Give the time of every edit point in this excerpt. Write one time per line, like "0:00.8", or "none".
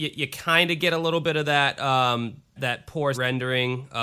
0:02.6
0:03.1